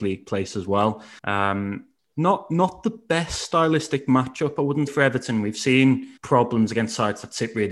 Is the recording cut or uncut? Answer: cut